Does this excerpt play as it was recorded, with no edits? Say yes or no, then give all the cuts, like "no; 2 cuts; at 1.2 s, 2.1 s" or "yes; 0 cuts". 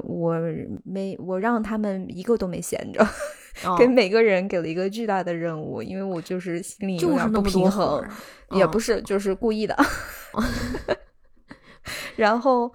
no; 1 cut; at 10.3 s